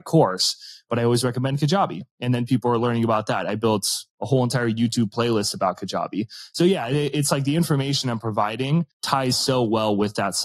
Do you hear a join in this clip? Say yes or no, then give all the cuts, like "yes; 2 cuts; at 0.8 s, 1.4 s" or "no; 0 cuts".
yes; 2 cuts; at 4.1 s, 8.9 s